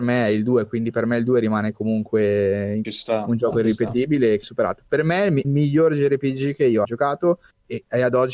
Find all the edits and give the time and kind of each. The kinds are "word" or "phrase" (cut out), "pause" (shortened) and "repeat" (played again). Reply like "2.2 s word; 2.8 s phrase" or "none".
2.8 s phrase; 4.4 s phrase; 5.4 s phrase; 6.8 s phrase